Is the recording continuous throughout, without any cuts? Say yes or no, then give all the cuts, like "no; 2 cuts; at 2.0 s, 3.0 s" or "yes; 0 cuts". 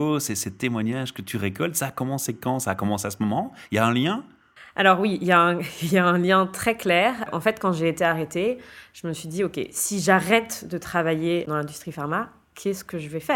yes; 0 cuts